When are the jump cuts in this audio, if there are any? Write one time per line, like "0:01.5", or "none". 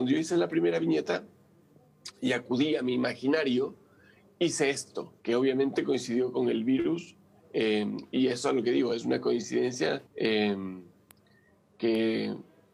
0:05.2
0:10.1